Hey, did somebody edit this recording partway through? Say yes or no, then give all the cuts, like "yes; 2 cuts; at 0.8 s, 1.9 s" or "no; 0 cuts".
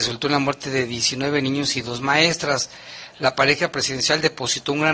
no; 0 cuts